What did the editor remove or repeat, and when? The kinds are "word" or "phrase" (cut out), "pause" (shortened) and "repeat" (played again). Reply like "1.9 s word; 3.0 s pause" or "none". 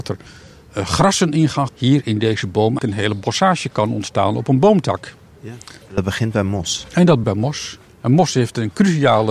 1.7 s phrase; 2.8 s word; 5.8 s pause; 7.2 s word